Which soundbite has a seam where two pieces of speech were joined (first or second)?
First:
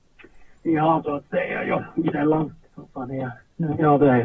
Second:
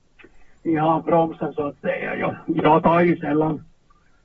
first